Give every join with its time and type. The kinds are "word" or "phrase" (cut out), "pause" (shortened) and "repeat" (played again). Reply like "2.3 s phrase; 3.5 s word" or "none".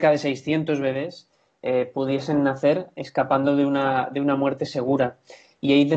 none